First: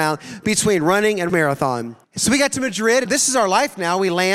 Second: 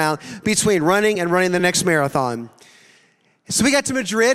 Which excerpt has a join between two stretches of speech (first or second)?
first